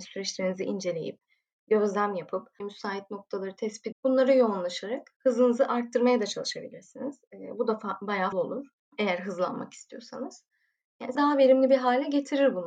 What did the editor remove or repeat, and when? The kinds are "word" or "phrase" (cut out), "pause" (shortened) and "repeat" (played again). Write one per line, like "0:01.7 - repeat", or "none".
0:02.6 - word
0:03.9 - word
0:08.3 - word
0:11.2 - word